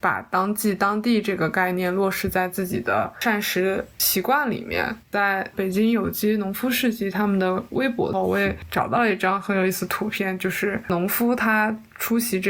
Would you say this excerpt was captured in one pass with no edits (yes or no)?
no